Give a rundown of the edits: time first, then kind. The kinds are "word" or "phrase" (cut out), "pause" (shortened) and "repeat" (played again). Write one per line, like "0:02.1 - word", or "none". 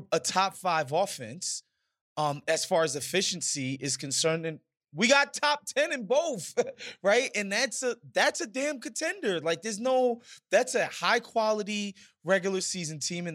none

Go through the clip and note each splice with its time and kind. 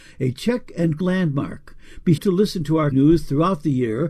0:01.0 - word
0:02.2 - word
0:02.9 - word

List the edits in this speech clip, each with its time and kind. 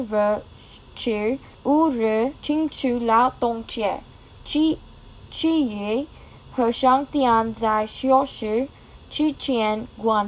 0:01.5 - pause
0:02.4 - pause

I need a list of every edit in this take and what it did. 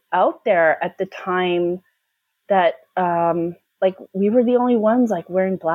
none

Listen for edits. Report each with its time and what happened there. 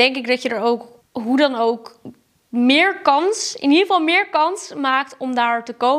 none

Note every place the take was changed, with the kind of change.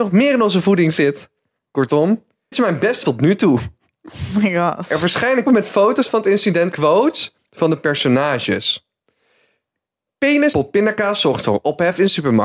0:02.5 - word
0:03.0 - word
0:05.5 - word
0:06.7 - word
0:10.5 - word

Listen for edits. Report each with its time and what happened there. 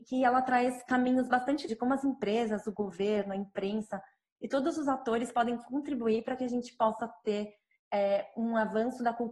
0:01.7 - word

